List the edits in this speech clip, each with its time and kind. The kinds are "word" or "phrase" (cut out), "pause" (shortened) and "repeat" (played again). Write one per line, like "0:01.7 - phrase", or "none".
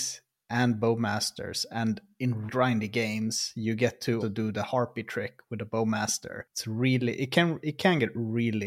0:02.5 - word
0:04.2 - word